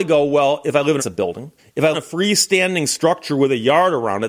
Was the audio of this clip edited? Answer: yes; 3 cuts; at 1.0 s, 1.6 s, 1.9 s

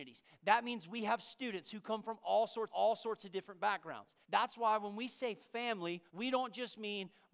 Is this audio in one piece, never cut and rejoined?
no; 3 cuts; at 2.7 s, 4.2 s, 6.1 s

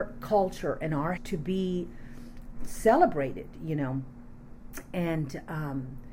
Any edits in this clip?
yes; 2 cuts; at 1.2 s, 2.5 s

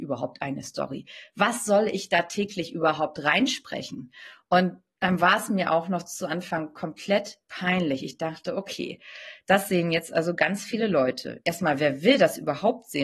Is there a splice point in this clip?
no; 0 cuts

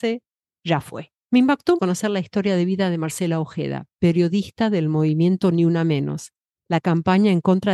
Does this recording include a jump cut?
yes; 2 cuts; at 1.2 s, 1.8 s

